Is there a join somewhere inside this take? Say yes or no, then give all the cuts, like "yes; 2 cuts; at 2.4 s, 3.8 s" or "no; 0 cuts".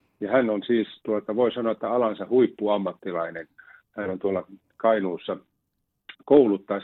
no; 0 cuts